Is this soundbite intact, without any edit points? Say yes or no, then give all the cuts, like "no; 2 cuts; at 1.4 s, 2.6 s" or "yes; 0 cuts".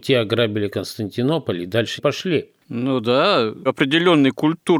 no; 3 cuts; at 2.0 s, 2.6 s, 3.7 s